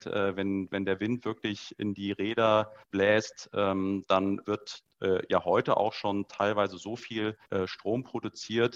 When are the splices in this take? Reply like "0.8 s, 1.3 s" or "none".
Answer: 2.8 s, 4.4 s, 7.4 s